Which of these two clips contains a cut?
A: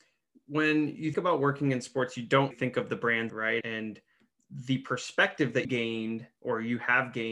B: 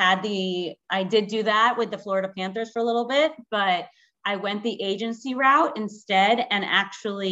A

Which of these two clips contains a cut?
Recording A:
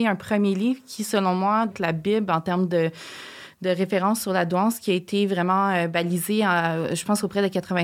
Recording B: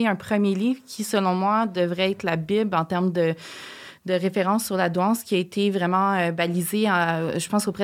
A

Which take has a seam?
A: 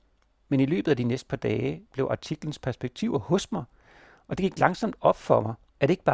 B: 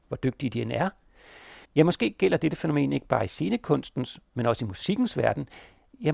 B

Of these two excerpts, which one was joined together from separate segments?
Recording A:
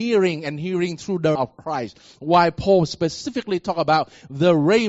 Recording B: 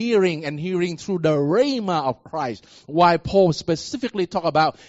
A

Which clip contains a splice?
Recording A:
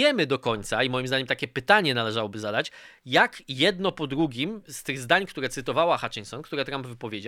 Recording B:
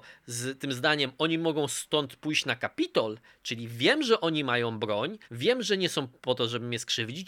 B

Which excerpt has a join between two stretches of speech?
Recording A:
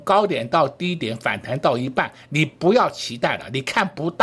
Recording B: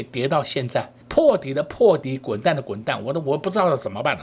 B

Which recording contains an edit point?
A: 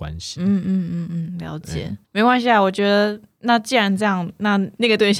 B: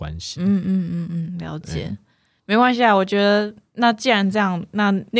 A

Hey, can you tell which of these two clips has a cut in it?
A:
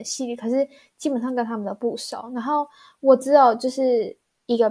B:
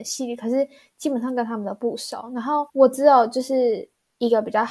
B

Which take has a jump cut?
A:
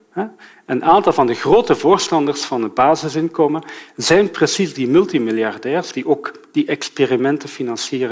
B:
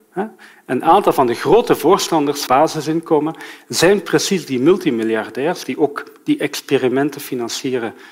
B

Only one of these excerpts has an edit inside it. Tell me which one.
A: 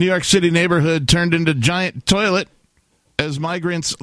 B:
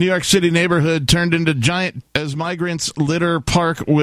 B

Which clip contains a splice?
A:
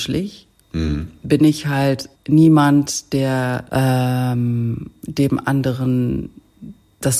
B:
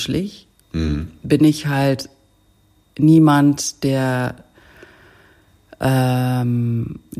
A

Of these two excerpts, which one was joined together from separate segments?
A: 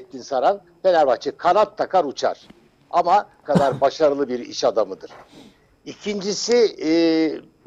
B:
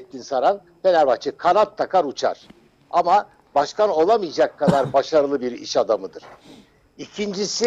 A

